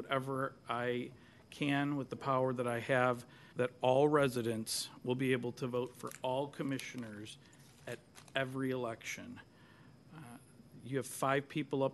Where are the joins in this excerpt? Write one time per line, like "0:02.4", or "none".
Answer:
0:03.5